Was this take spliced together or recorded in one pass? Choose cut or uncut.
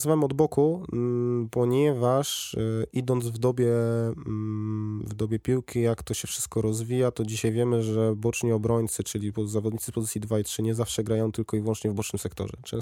uncut